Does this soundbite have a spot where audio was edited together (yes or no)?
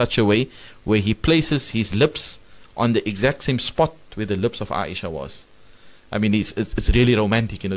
no